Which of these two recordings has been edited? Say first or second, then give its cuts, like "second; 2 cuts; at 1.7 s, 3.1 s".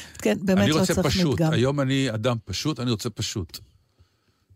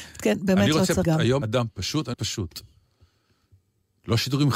second; 3 cuts; at 1.0 s, 1.4 s, 2.1 s